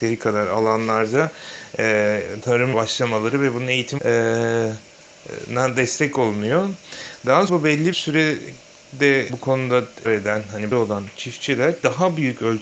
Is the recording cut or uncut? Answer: cut